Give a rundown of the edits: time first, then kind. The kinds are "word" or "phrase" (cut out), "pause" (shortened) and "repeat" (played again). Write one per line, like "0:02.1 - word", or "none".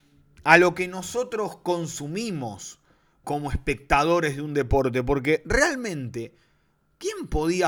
0:03.2 - word